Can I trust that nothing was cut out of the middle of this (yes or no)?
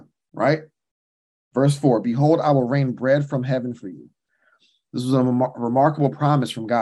yes